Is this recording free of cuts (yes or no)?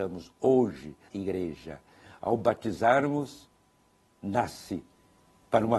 no